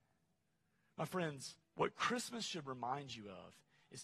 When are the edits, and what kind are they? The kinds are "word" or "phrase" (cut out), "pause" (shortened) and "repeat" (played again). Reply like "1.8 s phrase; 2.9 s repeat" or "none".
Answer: 1.6 s pause